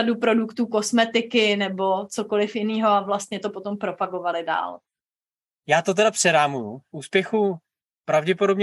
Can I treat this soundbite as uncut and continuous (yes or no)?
yes